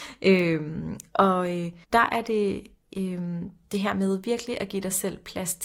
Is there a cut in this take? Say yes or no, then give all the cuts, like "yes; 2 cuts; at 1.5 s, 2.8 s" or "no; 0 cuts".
yes; 1 cut; at 1.8 s